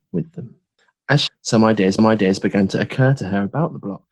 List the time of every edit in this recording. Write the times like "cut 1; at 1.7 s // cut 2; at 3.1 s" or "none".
cut 1; at 1.3 s // cut 2; at 2.0 s